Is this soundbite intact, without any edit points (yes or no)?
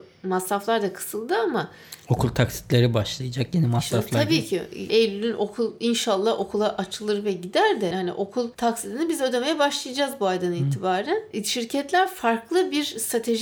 no